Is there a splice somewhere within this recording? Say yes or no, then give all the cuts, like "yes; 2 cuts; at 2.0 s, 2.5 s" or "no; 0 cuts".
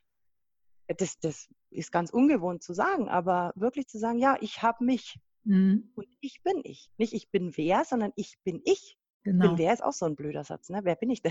no; 0 cuts